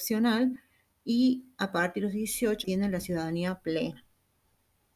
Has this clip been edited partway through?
yes; 1 cut; at 2.6 s

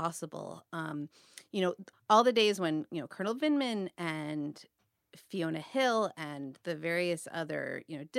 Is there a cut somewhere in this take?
no; 0 cuts

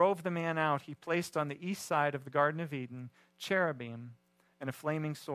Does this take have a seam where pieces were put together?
no; 0 cuts

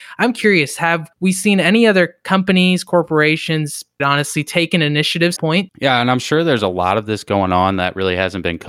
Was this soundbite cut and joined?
yes; 3 cuts; at 1.1 s, 4.0 s, 5.4 s

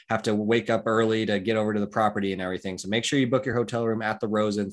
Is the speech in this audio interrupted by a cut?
no; 0 cuts

